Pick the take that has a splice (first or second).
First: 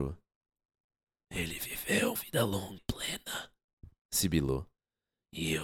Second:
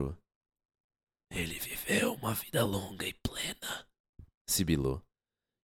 first